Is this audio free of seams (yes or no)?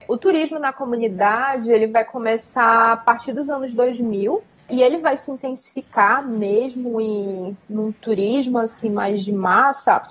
yes